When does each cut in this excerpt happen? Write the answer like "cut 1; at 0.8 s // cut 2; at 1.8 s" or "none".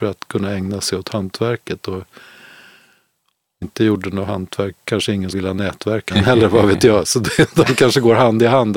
cut 1; at 3.6 s // cut 2; at 5.3 s // cut 3; at 6.1 s